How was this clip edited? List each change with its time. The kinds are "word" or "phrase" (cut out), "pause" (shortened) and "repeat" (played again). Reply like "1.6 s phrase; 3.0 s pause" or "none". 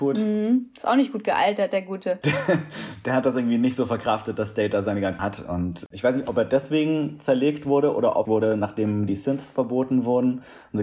5.2 s phrase; 8.3 s phrase